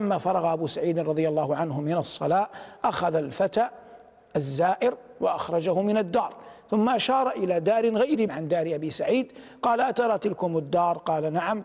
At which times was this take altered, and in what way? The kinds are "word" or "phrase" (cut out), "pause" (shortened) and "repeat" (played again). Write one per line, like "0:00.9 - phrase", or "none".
0:08.3 - word